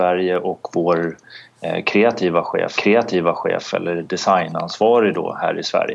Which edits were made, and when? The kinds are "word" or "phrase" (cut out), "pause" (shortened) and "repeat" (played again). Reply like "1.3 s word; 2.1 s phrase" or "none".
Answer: 2.8 s repeat